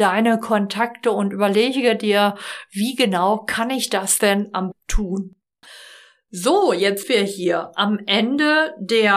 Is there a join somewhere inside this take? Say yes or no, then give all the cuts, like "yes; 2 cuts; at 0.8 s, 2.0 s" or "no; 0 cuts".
yes; 2 cuts; at 4.7 s, 7.0 s